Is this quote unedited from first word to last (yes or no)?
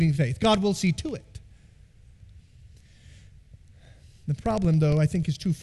yes